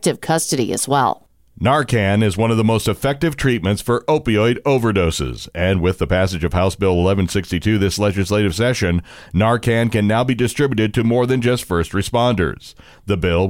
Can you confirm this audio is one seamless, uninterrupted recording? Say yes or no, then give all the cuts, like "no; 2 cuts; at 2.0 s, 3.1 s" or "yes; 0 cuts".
yes; 0 cuts